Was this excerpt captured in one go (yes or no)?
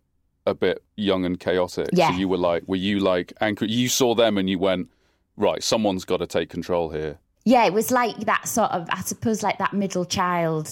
yes